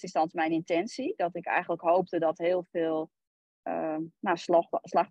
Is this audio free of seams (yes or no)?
yes